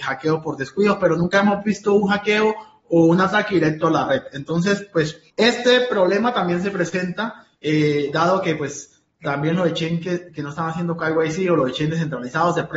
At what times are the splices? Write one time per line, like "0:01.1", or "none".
0:05.3
0:07.6